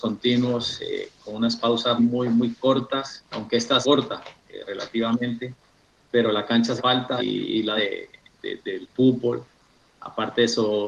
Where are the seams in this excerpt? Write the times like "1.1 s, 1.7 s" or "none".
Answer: 2.0 s, 3.3 s, 3.8 s, 6.8 s, 7.2 s, 7.8 s